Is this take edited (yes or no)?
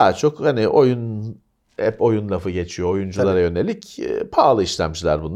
no